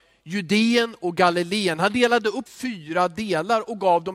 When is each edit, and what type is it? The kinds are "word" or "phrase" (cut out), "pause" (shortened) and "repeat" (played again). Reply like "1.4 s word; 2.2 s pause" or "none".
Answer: 2.5 s phrase